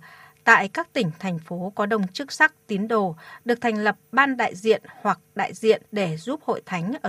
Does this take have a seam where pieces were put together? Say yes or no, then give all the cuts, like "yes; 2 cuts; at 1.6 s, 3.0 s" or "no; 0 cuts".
yes; 1 cut; at 5.9 s